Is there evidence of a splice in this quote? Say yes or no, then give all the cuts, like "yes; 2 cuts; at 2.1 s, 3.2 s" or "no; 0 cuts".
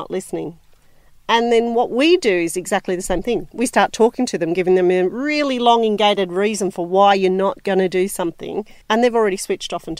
yes; 1 cut; at 8.8 s